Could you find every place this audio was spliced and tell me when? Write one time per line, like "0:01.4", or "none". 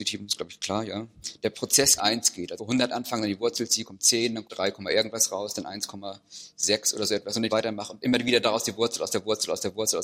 0:02.0
0:02.6
0:04.4
0:07.5

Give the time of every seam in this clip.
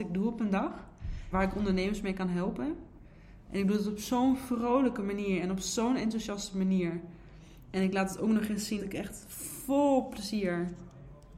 0:01.3
0:08.8

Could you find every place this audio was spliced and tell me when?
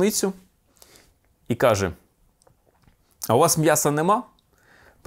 none

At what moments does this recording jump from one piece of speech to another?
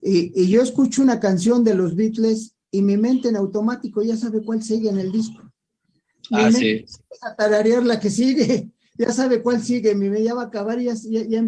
none

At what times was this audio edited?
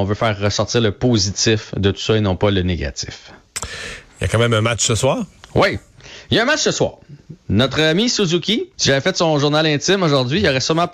0:04.1
0:08.7

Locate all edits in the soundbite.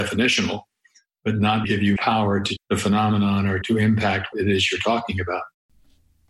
0:01.6
0:02.0
0:02.6
0:03.6
0:04.3

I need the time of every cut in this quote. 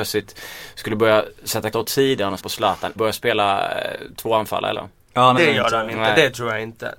0:01.7
0:02.4
0:03.0
0:04.7
0:05.4

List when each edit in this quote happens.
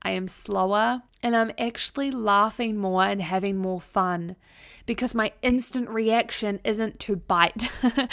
0:01.1

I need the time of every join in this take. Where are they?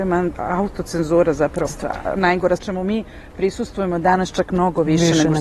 0:01.7
0:02.6

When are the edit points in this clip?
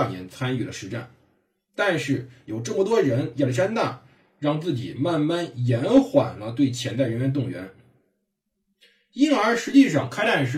none

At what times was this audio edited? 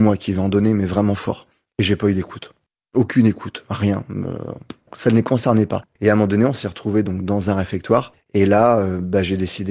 none

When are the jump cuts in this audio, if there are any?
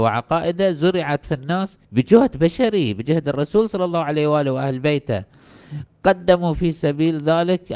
0:01.8
0:05.9

